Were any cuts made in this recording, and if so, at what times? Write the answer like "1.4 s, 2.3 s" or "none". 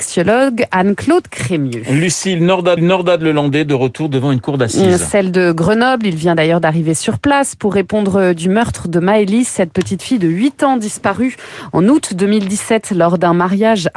2.8 s